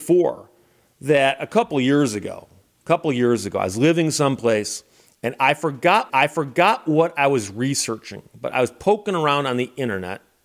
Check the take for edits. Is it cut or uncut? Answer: cut